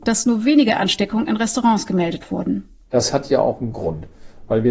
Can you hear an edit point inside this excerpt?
no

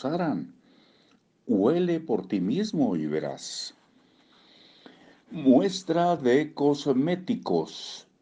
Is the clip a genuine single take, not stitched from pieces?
yes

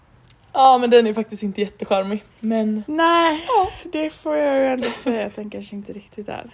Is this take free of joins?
no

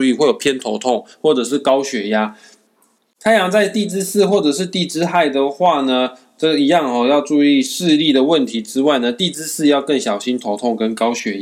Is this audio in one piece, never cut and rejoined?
yes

